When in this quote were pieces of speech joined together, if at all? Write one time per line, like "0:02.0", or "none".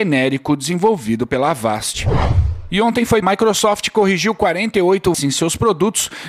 0:03.2
0:05.1